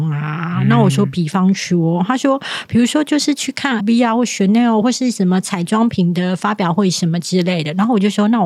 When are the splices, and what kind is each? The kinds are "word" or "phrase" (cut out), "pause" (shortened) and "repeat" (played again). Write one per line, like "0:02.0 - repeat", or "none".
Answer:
0:03.8 - word